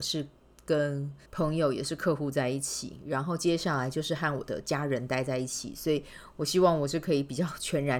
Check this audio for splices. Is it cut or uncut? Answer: cut